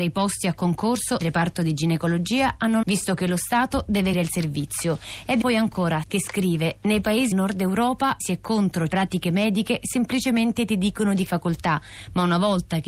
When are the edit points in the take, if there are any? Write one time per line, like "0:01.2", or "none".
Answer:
0:01.2
0:02.8
0:04.1
0:05.4
0:06.0
0:07.3
0:08.2
0:08.9
0:11.3